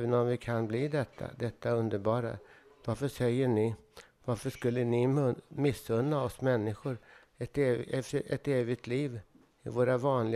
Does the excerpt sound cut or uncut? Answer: uncut